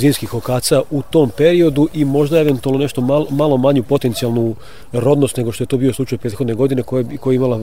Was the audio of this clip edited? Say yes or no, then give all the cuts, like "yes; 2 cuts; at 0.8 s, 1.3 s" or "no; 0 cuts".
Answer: no; 0 cuts